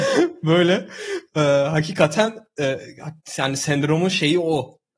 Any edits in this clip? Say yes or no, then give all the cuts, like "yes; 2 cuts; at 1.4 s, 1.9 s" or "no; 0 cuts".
no; 0 cuts